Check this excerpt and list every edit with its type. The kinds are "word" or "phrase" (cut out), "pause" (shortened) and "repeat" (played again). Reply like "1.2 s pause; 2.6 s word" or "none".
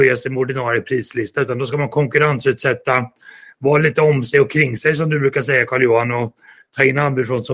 none